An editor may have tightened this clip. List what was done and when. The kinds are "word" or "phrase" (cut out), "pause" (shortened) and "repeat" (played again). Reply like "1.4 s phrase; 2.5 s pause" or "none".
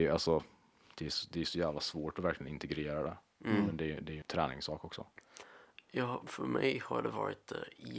4.2 s word; 6.2 s word